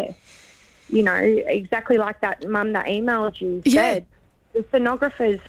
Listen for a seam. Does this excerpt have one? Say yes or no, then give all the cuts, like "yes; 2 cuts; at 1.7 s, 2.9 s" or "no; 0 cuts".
no; 0 cuts